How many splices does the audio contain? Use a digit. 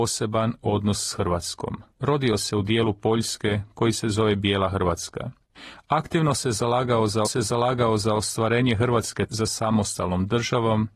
3